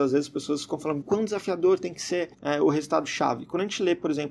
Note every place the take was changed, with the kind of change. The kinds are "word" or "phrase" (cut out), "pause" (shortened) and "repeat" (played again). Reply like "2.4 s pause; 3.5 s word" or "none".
1.0 s word; 2.3 s pause